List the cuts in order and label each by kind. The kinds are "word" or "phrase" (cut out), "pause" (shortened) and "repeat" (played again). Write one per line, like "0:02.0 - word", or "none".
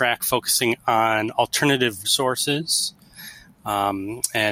0:02.0 - word